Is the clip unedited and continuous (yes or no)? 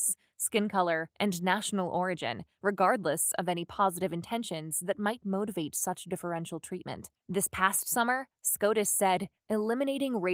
no